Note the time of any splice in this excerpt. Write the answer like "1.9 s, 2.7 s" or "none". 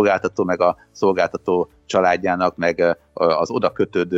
none